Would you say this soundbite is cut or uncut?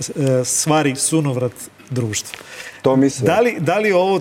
cut